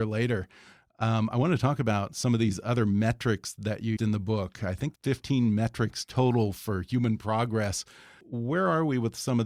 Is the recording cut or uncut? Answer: cut